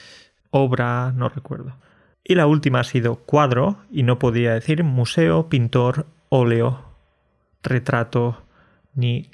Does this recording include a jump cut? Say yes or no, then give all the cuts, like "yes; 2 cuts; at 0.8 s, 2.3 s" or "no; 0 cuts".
no; 0 cuts